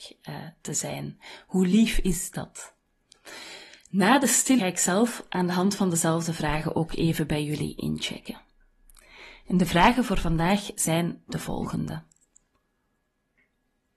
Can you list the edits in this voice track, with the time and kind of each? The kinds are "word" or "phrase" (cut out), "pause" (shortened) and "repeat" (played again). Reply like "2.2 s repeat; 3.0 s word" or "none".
4.6 s phrase